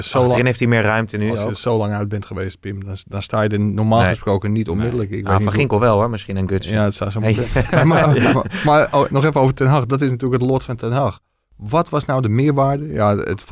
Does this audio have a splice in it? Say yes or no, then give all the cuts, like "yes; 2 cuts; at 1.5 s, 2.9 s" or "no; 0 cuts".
no; 0 cuts